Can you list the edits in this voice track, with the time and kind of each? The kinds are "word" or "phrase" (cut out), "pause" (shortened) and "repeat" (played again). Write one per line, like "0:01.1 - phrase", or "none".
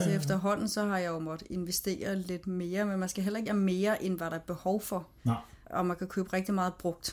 0:03.5 - word
0:05.2 - pause
0:05.6 - pause